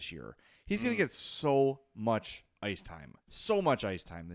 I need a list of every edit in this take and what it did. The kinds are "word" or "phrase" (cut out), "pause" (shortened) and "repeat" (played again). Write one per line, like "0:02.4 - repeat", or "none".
0:03.2 - pause